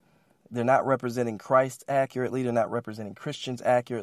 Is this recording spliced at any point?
no; 0 cuts

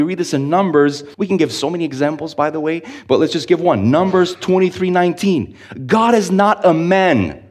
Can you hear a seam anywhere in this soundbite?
yes; 1 cut; at 1.1 s

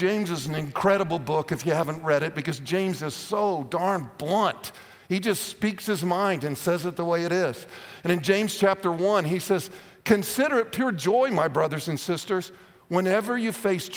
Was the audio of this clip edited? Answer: no; 0 cuts

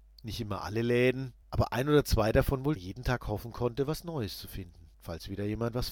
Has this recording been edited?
yes; 3 cuts; at 1.4 s, 2.8 s, 4.9 s

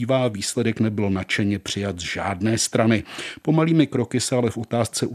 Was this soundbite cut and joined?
no; 0 cuts

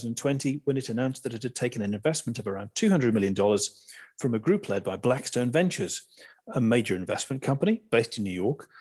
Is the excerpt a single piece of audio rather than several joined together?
yes; 0 cuts

